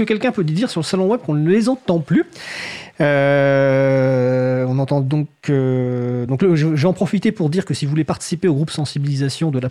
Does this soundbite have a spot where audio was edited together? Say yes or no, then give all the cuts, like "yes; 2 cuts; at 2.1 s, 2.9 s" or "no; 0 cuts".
no; 0 cuts